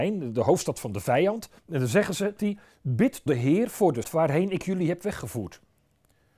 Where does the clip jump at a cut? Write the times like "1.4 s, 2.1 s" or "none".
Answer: 1.6 s, 2.4 s, 3.3 s, 4.0 s